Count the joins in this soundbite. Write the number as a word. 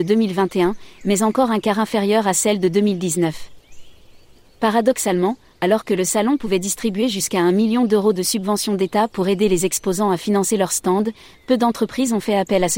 zero